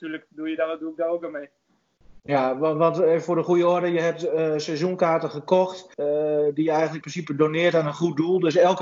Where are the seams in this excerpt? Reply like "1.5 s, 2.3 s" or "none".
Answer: 5.9 s, 7.0 s